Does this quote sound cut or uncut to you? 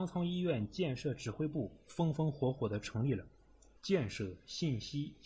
cut